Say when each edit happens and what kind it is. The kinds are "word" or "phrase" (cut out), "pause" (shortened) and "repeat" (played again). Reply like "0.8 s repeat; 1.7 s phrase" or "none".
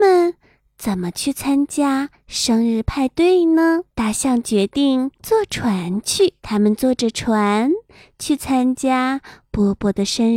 3.9 s pause; 5.1 s pause; 6.4 s pause